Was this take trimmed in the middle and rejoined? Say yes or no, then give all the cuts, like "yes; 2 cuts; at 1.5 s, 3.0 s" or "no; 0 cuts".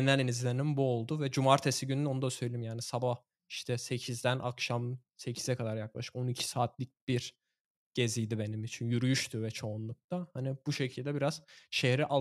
no; 0 cuts